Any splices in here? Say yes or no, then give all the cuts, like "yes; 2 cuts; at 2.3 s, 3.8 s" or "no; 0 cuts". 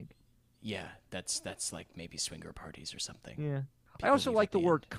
no; 0 cuts